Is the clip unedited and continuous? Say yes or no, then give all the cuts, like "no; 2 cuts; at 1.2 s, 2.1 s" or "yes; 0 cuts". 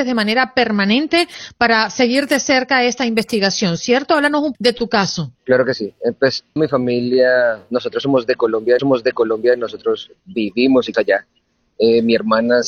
no; 5 cuts; at 4.5 s, 5.4 s, 6.6 s, 8.8 s, 10.9 s